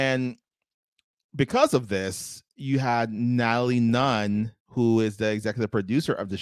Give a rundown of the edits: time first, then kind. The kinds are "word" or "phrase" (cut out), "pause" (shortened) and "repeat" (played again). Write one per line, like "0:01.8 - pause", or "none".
0:04.6 - pause